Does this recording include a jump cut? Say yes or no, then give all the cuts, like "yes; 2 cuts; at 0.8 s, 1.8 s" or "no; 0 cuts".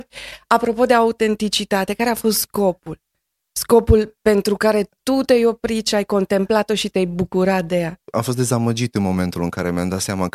no; 0 cuts